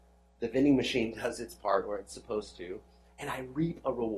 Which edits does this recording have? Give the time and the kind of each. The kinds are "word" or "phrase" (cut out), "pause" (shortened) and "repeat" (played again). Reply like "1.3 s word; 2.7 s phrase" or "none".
none